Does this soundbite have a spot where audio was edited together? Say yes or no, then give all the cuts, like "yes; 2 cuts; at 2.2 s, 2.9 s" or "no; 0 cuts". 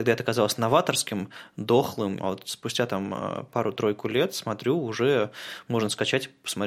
yes; 1 cut; at 2.2 s